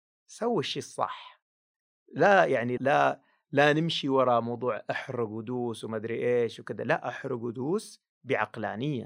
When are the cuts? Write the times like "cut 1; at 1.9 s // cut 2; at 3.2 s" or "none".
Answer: cut 1; at 2.8 s